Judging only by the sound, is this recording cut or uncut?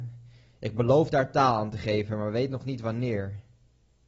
uncut